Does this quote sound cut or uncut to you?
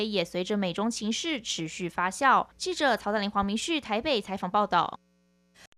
cut